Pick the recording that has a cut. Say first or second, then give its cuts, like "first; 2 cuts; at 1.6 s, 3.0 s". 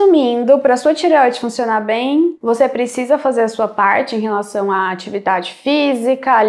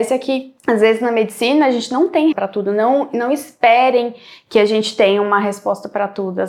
second; 1 cut; at 2.3 s